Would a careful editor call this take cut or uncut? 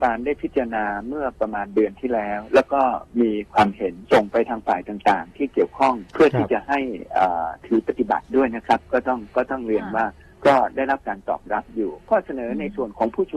cut